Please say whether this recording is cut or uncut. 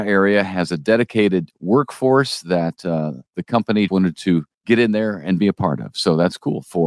cut